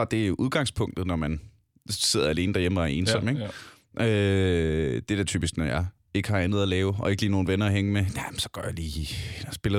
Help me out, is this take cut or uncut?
uncut